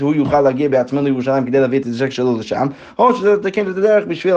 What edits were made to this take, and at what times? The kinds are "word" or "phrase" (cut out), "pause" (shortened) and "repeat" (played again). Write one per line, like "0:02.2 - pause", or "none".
0:01.8 - word